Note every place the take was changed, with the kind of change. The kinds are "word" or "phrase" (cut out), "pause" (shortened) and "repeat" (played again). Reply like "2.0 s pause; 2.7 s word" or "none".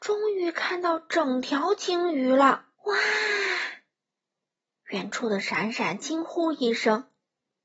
2.7 s pause